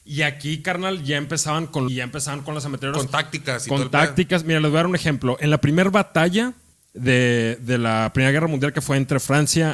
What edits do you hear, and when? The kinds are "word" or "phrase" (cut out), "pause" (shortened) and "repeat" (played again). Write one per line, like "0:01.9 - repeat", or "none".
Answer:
0:01.9 - phrase
0:06.7 - pause